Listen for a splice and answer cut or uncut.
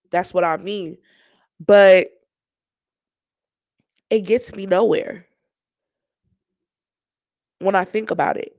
uncut